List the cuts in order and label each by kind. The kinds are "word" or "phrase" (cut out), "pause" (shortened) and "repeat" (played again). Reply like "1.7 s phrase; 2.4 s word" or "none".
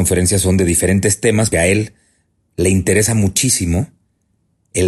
1.5 s word